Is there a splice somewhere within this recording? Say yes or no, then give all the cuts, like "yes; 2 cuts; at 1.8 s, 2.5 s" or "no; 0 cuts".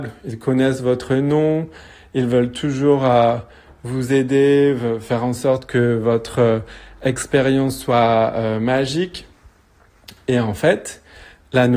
no; 0 cuts